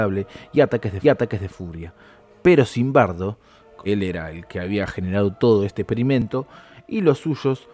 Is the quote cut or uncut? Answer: cut